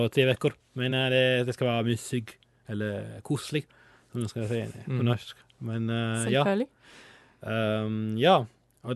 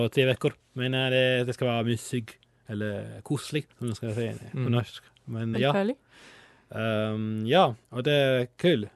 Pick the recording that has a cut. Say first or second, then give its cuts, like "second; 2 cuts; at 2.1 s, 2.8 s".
second; 3 cuts; at 3.7 s, 5.5 s, 7.8 s